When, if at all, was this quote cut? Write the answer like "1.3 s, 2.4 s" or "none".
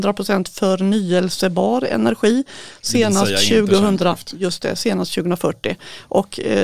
none